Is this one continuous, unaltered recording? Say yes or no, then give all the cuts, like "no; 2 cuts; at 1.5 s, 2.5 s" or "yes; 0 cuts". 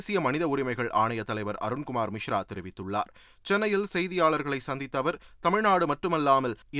yes; 0 cuts